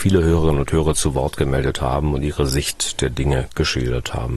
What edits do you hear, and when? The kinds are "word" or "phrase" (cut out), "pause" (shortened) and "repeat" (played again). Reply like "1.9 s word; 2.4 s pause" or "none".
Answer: none